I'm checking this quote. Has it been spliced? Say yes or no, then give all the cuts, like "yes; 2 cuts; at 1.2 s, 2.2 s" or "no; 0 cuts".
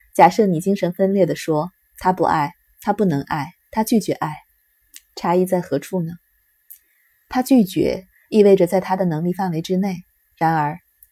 no; 0 cuts